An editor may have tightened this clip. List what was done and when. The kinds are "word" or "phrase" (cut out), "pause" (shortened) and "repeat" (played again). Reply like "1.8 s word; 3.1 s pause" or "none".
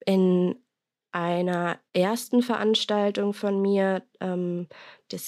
1.9 s pause